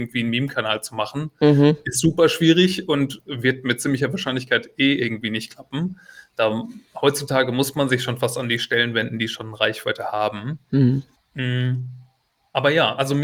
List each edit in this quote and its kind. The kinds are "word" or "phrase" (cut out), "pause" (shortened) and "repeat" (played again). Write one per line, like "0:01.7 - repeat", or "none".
0:11.2 - pause